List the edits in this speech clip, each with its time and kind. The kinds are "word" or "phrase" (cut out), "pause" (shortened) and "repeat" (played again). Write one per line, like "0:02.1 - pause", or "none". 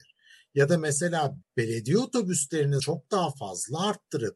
0:01.4 - word
0:02.8 - word